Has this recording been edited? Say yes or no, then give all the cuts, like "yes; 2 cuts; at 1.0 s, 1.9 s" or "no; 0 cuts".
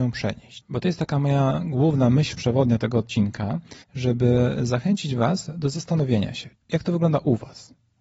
yes; 1 cut; at 3.8 s